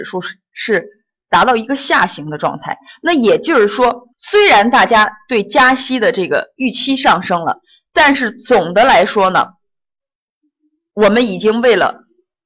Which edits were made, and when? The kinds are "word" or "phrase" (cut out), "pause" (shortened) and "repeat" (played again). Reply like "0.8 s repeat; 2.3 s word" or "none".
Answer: 4.1 s pause